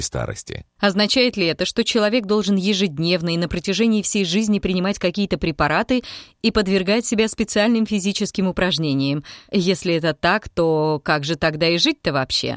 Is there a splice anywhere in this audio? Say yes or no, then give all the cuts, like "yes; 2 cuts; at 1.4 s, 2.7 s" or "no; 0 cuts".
no; 0 cuts